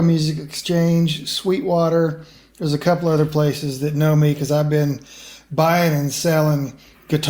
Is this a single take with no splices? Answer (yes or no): yes